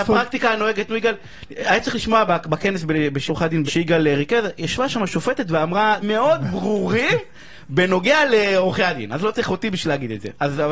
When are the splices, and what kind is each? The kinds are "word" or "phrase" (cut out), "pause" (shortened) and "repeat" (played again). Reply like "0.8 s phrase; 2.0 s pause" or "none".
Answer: 3.3 s word; 3.7 s word; 6.0 s word

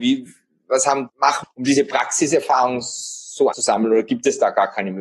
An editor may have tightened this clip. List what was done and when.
1.1 s word; 1.4 s word; 3.5 s word

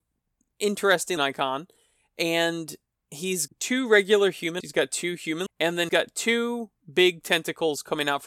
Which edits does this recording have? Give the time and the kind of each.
1.2 s word; 3.5 s word; 4.6 s word; 5.5 s word; 5.9 s word

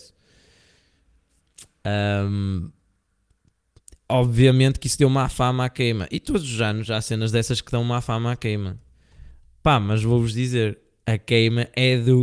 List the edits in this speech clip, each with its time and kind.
none

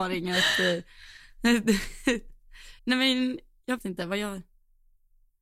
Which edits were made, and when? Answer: 2.8 s pause; 3.8 s word

